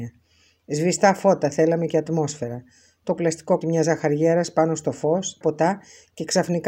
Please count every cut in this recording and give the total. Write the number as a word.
three